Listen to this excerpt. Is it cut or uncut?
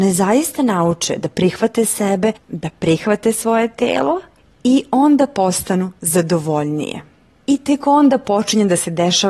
uncut